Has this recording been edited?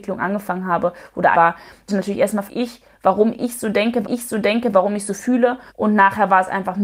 yes; 5 cuts; at 1.3 s, 1.9 s, 2.5 s, 4.0 s, 5.7 s

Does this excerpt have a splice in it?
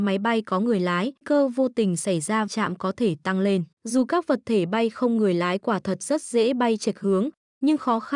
yes; 3 cuts; at 1.2 s, 2.5 s, 3.7 s

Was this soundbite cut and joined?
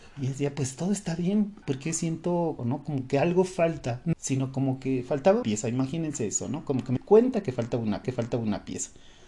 yes; 6 cuts; at 1.6 s, 2.6 s, 4.1 s, 5.4 s, 7.0 s, 8.0 s

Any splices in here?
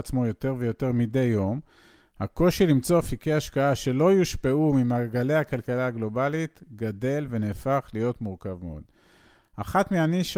no; 0 cuts

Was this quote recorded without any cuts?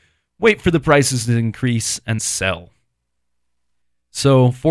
no; 1 cut; at 2.2 s

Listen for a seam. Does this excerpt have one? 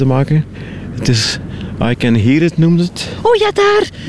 no; 0 cuts

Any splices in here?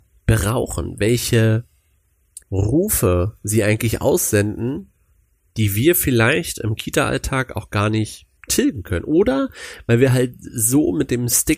yes; 3 cuts; at 2.4 s, 5.3 s, 8.4 s

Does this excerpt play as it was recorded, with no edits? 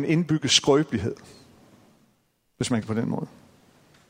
no; 1 cut; at 2.8 s

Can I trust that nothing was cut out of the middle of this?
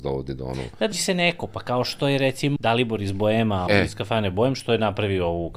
no; 3 cuts; at 0.9 s, 2.6 s, 3.7 s

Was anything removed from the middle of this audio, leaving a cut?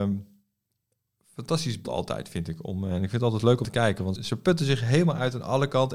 yes; 3 cuts; at 1.8 s, 3.6 s, 4.2 s

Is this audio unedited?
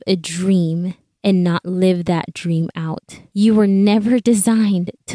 yes; 0 cuts

